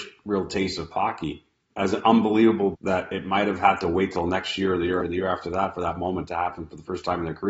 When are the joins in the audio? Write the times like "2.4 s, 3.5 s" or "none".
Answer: 0.9 s, 1.7 s, 2.7 s, 5.0 s